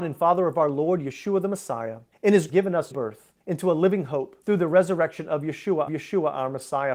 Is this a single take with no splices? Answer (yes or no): no